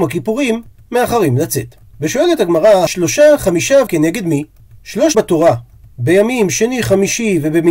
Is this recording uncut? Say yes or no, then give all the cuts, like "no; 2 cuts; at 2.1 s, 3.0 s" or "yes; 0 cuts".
no; 3 cuts; at 2.9 s, 3.9 s, 5.1 s